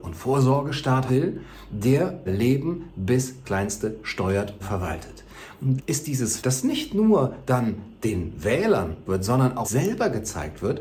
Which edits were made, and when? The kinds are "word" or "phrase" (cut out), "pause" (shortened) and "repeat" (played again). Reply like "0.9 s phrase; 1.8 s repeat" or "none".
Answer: 1.1 s word; 2.3 s word; 3.4 s word; 4.6 s word; 5.8 s word; 6.4 s word; 9.1 s word; 9.6 s word